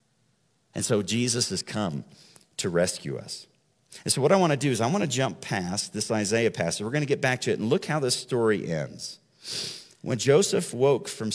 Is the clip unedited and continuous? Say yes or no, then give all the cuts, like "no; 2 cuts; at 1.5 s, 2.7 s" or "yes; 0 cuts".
yes; 0 cuts